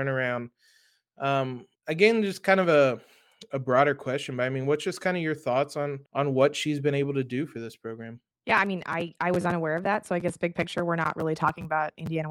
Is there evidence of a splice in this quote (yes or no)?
yes